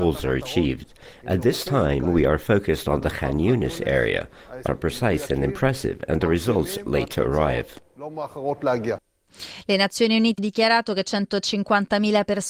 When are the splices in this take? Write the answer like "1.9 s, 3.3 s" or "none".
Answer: 4.7 s, 6.9 s, 10.4 s